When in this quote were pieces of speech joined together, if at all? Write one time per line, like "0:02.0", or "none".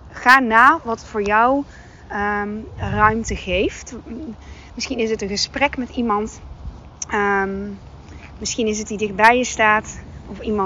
0:08.9